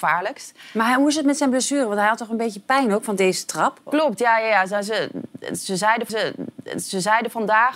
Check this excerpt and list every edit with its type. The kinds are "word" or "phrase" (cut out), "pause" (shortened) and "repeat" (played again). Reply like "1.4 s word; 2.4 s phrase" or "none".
6.1 s repeat